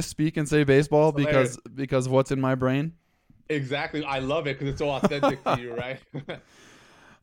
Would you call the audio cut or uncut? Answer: uncut